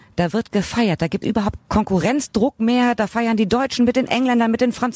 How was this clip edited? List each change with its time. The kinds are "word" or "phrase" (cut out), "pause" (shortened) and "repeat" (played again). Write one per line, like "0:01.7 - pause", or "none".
0:01.2 - word
0:01.6 - phrase